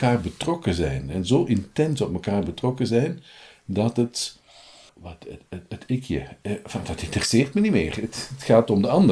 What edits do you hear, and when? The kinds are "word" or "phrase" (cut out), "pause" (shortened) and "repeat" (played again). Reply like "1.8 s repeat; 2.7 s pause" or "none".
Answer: none